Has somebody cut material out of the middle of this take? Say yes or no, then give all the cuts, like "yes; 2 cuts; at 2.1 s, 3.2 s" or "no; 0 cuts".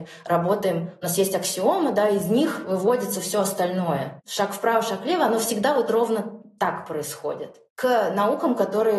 no; 0 cuts